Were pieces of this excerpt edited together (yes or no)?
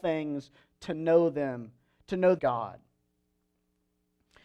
yes